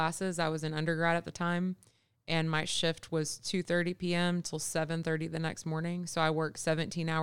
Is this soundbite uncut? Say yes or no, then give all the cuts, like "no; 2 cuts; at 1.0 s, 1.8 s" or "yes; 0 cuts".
yes; 0 cuts